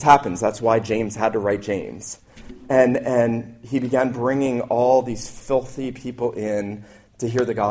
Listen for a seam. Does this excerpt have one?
no; 0 cuts

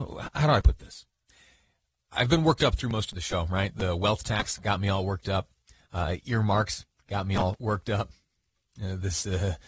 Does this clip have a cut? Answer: no; 0 cuts

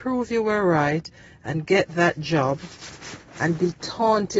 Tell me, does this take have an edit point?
no; 0 cuts

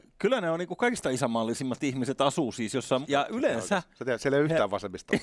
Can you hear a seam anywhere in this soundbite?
yes; 1 cut; at 3.0 s

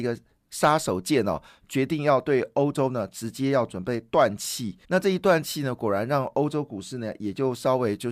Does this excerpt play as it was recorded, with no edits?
no; 1 cut; at 4.8 s

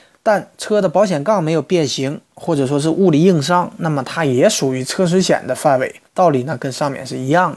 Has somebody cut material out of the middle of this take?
yes; 1 cut; at 6.1 s

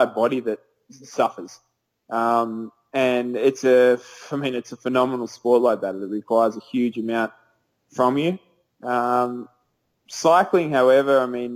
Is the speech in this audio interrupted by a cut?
no; 0 cuts

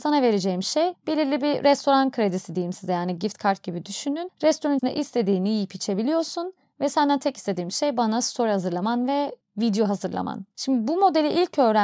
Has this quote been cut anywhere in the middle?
yes; 1 cut; at 4.8 s

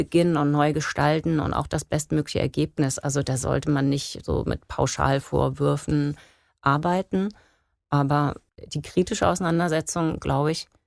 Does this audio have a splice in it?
no; 0 cuts

